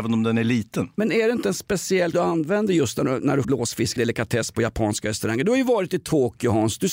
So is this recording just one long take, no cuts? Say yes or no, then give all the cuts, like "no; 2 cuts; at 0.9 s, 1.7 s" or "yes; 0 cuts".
no; 3 cuts; at 2.1 s, 3.4 s, 4.0 s